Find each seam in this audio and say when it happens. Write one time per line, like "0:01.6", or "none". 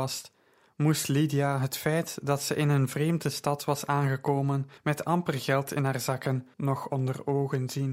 0:04.8
0:06.5